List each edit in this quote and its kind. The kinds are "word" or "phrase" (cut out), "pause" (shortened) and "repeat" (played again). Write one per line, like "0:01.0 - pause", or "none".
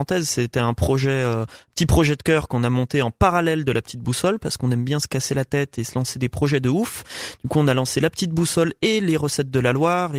none